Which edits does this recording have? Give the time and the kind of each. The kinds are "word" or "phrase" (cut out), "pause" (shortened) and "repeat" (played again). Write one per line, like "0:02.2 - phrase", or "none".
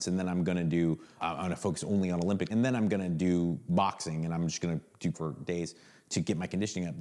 0:01.2 - word
0:02.5 - word
0:05.1 - word